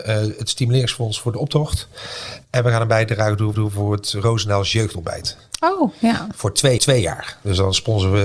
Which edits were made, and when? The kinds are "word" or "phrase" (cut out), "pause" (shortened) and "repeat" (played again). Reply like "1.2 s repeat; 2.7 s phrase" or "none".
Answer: 3.5 s repeat; 6.8 s repeat